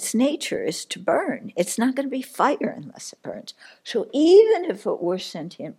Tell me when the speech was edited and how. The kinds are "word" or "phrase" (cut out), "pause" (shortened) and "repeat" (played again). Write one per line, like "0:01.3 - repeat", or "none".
none